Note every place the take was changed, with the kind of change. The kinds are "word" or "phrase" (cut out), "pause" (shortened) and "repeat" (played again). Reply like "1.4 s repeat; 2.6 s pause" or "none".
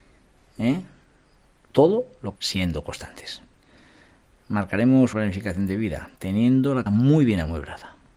2.4 s word; 5.1 s word; 6.2 s pause; 6.9 s word